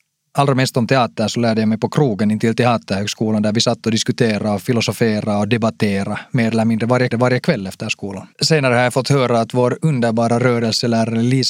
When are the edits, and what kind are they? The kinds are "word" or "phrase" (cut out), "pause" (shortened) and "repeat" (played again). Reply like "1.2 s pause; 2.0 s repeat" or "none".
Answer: 7.1 s repeat; 8.3 s pause